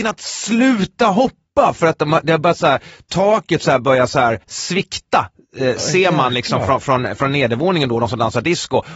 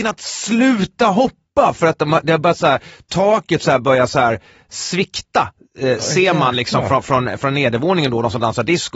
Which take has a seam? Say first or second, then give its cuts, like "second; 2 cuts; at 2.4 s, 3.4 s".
first; 1 cut; at 4.4 s